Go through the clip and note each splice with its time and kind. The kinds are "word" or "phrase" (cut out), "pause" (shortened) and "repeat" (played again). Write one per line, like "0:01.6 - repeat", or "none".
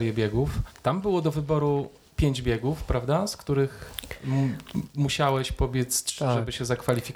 none